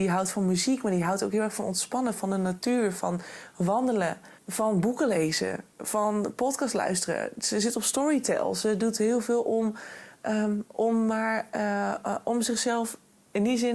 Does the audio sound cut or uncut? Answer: cut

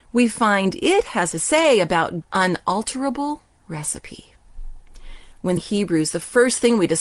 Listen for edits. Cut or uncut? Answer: cut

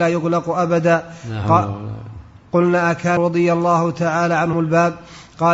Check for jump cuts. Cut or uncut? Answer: cut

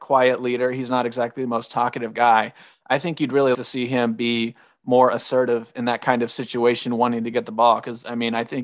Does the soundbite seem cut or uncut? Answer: cut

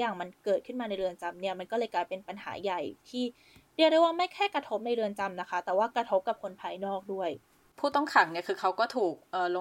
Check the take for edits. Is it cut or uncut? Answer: uncut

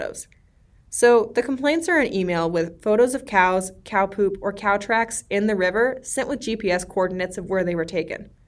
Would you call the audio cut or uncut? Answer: uncut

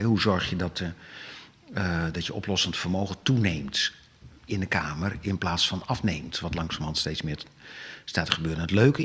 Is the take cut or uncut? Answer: uncut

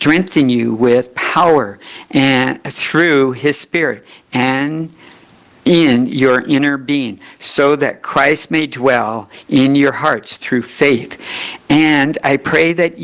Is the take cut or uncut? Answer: uncut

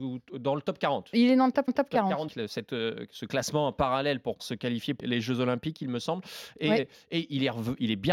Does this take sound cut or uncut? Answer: cut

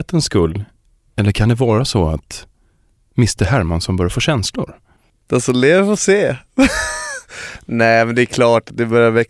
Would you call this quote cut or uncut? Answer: uncut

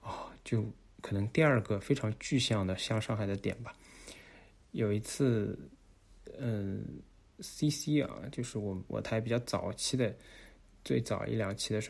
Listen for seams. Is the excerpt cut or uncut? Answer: uncut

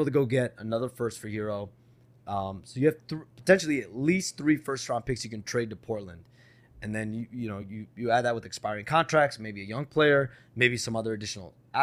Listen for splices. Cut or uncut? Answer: uncut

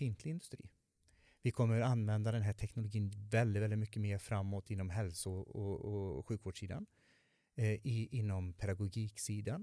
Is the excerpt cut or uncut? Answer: uncut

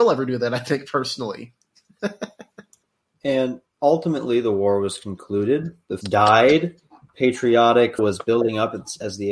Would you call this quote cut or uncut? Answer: cut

